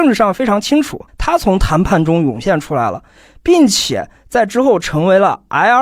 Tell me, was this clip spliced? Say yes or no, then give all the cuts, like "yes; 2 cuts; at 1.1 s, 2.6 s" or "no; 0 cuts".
yes; 1 cut; at 1.1 s